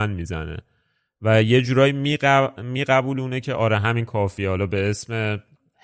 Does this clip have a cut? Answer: no; 0 cuts

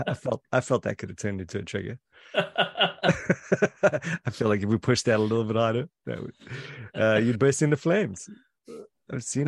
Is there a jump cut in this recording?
no; 0 cuts

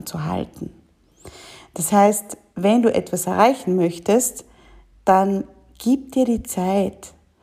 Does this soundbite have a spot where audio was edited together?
no; 0 cuts

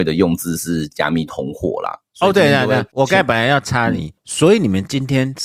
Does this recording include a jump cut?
yes; 2 cuts; at 2.9 s, 4.2 s

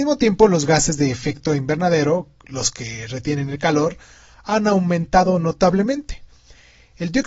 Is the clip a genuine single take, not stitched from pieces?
yes; 0 cuts

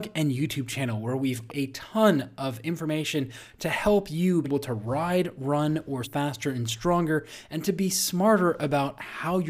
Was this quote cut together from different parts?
yes; 3 cuts; at 1.5 s, 4.4 s, 6.0 s

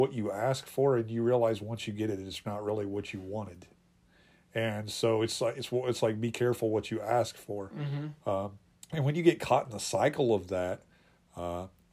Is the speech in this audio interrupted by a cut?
yes; 1 cut; at 8.8 s

